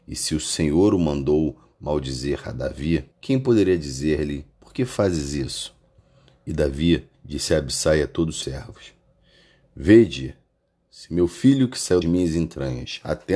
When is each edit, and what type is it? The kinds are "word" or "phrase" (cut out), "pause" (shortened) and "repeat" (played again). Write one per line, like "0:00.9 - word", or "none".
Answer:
0:03.1 - pause
0:04.5 - pause
0:06.0 - pause
0:07.1 - pause
0:08.4 - word
0:12.0 - word